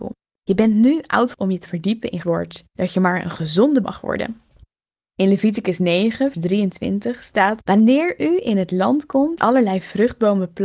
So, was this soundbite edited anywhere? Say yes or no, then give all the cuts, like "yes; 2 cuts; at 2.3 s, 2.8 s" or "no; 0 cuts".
yes; 6 cuts; at 1.3 s, 1.7 s, 2.2 s, 3.8 s, 6.3 s, 9.4 s